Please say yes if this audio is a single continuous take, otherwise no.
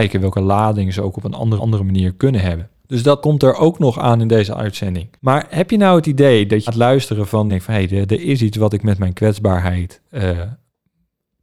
no